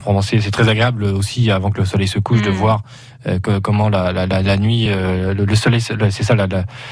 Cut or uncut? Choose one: uncut